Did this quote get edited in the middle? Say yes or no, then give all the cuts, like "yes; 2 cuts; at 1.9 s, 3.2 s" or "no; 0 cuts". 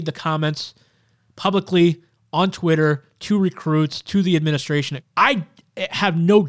yes; 1 cut; at 5.0 s